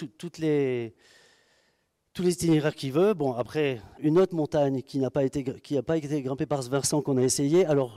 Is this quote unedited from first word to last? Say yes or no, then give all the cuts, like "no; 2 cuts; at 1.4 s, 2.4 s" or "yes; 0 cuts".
no; 1 cut; at 4.0 s